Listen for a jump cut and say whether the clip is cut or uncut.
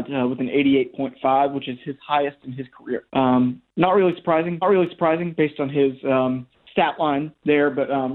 cut